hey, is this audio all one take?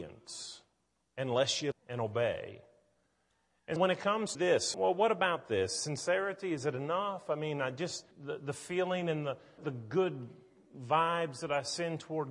no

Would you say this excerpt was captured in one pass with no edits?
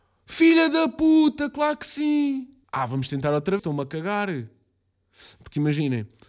no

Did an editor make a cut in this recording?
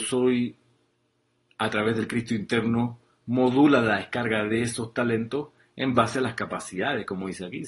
no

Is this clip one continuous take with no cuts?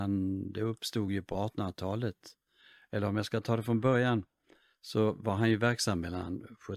yes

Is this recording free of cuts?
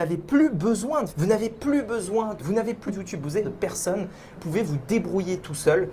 no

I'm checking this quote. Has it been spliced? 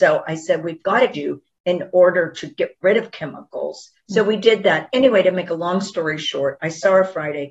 yes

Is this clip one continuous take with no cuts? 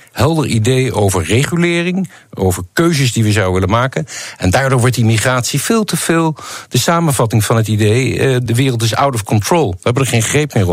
yes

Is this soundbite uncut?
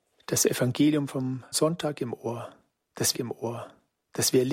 no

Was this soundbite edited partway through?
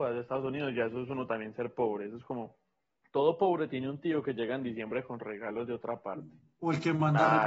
no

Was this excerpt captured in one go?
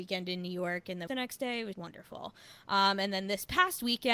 no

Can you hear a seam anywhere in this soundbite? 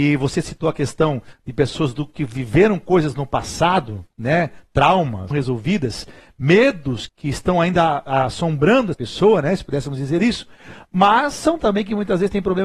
yes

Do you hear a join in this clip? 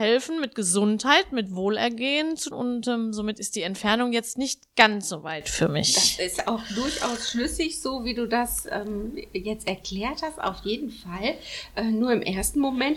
yes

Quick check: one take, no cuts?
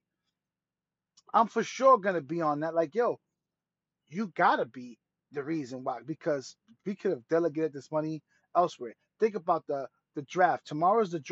yes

